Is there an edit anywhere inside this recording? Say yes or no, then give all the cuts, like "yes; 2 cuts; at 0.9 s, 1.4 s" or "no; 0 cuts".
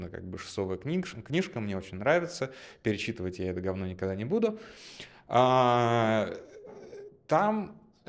no; 0 cuts